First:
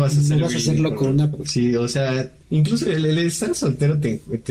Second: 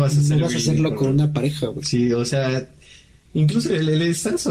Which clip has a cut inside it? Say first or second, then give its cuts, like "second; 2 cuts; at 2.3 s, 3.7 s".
first; 2 cuts; at 1.3 s, 2.4 s